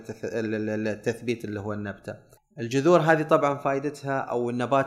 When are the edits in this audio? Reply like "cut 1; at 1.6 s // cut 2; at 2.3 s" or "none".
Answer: cut 1; at 2.4 s